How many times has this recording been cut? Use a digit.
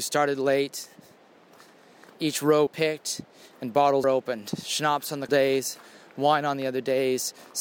3